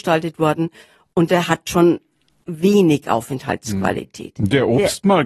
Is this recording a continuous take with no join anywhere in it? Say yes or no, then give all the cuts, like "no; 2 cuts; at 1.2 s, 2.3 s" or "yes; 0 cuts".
yes; 0 cuts